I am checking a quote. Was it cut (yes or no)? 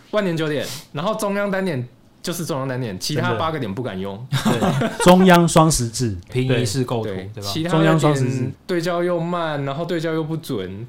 yes